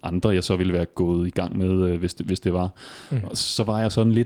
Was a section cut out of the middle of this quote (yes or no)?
no